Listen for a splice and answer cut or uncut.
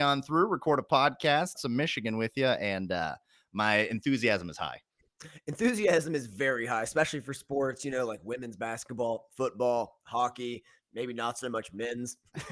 cut